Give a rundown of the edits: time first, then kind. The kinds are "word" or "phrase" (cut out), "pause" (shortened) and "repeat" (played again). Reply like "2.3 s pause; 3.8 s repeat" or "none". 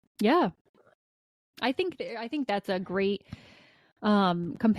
none